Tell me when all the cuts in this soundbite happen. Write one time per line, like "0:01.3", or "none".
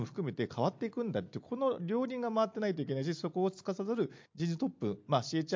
0:04.3